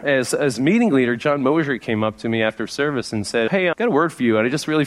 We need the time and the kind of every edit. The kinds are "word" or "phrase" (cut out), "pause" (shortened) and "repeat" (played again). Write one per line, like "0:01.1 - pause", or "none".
none